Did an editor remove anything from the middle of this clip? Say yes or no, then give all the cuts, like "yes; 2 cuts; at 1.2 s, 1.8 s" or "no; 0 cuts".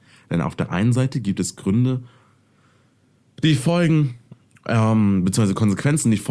no; 0 cuts